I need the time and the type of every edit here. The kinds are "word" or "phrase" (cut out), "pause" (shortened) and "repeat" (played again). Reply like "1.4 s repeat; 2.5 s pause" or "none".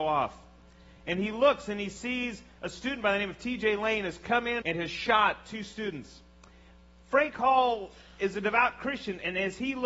4.6 s phrase